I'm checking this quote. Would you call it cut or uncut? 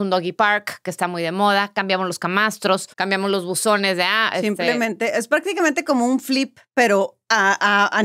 cut